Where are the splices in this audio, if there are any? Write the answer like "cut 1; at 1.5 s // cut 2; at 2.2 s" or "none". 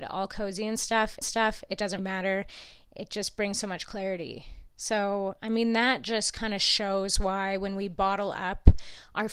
cut 1; at 1.2 s // cut 2; at 2.0 s // cut 3; at 4.7 s

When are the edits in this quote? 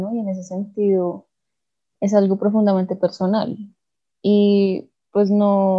none

